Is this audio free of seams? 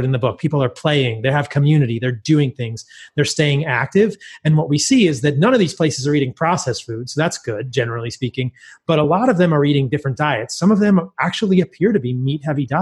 yes; 0 cuts

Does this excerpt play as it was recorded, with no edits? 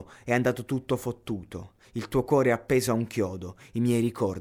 yes; 0 cuts

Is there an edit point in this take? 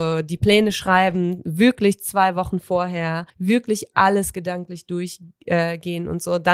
yes; 1 cut; at 3.3 s

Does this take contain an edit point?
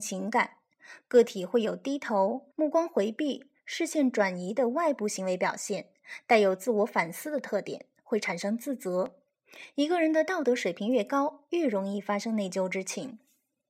yes; 1 cut; at 2.5 s

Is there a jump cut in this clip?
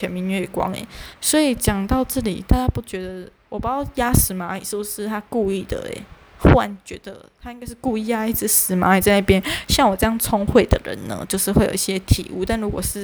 yes; 1 cut; at 1.1 s

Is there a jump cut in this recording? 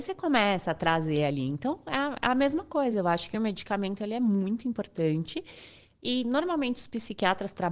no; 0 cuts

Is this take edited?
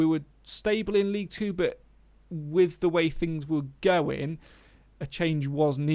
no; 0 cuts

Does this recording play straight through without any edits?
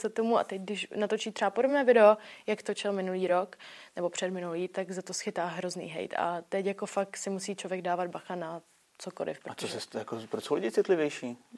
yes; 0 cuts

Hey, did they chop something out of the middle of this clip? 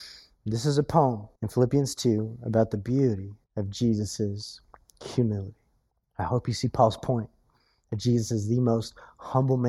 yes; 3 cuts; at 1.4 s, 3.4 s, 5.9 s

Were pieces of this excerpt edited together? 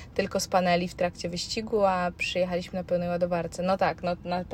no; 0 cuts

